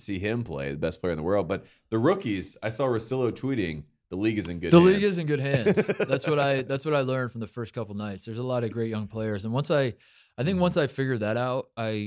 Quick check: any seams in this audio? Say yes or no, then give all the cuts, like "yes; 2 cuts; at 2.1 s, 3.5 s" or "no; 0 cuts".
no; 0 cuts